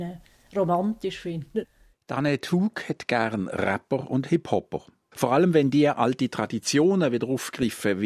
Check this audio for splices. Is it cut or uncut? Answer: uncut